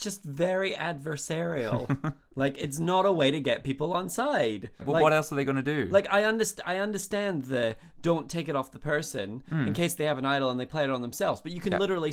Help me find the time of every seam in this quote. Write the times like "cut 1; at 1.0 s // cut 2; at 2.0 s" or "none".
cut 1; at 4.8 s